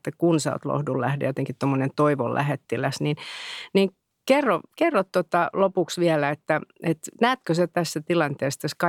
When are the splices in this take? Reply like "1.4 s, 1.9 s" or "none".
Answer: none